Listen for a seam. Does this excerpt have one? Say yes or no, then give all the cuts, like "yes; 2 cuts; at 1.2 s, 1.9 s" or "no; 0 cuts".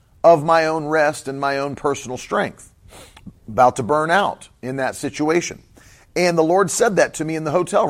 no; 0 cuts